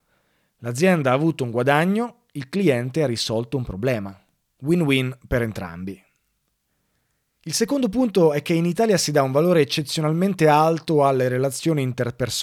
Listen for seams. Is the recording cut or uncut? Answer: uncut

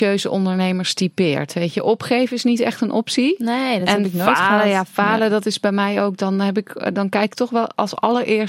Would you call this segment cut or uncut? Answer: uncut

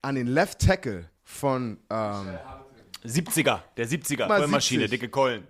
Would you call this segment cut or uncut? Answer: cut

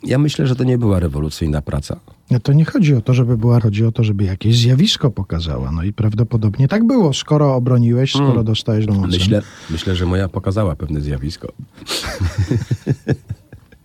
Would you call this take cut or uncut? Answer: cut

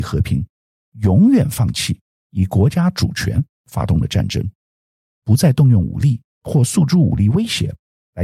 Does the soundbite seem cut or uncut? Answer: uncut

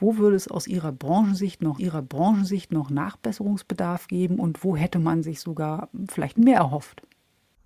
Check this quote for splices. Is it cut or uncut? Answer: cut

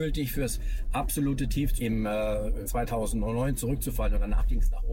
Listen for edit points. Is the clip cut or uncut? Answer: cut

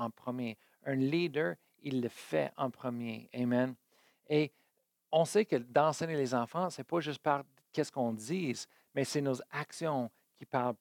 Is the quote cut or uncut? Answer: uncut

